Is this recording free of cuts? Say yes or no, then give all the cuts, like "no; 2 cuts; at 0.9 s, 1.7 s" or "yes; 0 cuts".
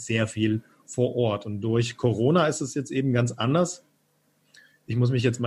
yes; 0 cuts